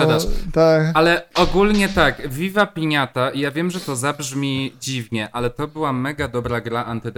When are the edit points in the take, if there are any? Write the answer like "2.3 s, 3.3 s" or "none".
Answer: none